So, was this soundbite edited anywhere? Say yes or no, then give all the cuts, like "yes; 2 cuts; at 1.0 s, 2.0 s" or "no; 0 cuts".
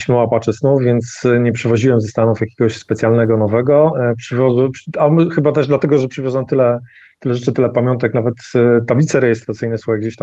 no; 0 cuts